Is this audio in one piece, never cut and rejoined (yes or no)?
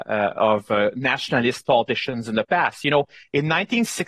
yes